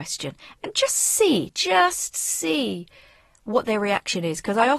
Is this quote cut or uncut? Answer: uncut